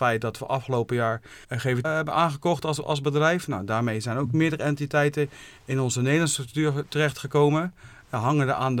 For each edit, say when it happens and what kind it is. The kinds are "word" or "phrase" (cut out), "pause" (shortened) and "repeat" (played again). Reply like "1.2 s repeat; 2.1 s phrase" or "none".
1.4 s pause; 1.8 s word